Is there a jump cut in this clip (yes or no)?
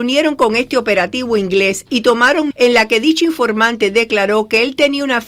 yes